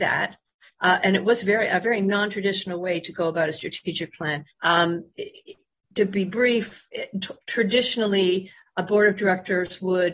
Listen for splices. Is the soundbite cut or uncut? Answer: cut